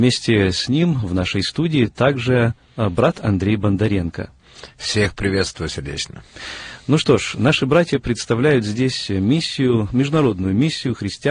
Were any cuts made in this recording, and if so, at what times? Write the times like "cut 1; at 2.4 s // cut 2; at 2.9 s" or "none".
none